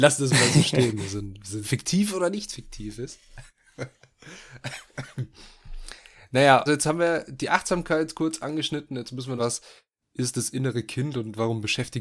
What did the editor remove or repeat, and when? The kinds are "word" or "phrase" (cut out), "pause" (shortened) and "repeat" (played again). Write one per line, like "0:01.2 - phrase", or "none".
0:01.6 - phrase
0:06.7 - word
0:09.4 - phrase